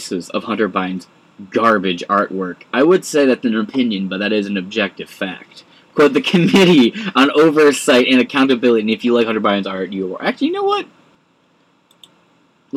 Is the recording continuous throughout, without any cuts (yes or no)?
yes